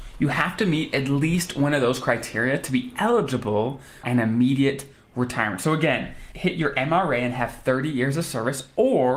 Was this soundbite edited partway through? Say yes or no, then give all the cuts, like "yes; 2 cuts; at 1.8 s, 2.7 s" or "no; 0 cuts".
yes; 2 cuts; at 4.0 s, 6.3 s